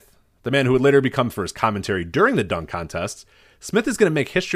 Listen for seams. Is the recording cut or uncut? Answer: cut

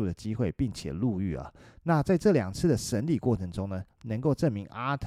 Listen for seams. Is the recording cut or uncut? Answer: uncut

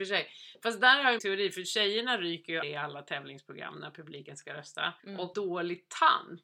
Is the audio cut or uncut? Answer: cut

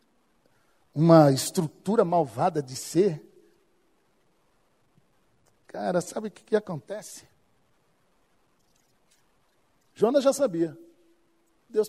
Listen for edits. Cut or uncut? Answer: uncut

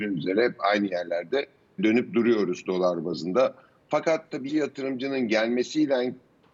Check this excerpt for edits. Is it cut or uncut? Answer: cut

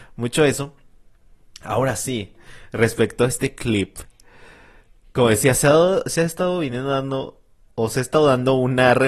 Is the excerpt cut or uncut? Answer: uncut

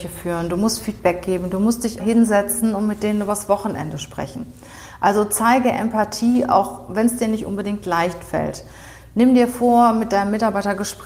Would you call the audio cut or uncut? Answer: cut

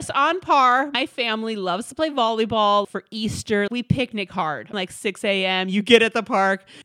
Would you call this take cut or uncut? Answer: cut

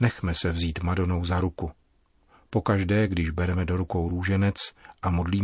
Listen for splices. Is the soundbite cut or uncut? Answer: uncut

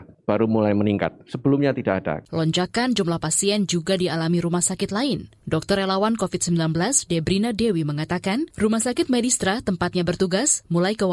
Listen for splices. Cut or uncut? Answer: cut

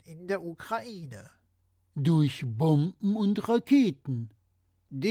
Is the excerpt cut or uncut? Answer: uncut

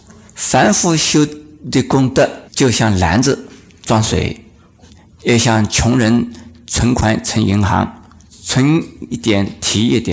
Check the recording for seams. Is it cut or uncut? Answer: cut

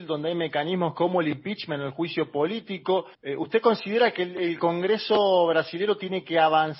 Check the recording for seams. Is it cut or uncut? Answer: cut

